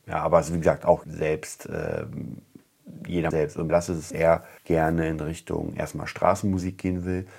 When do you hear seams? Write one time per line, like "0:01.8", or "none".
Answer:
0:01.0
0:03.3
0:03.7
0:04.1
0:04.6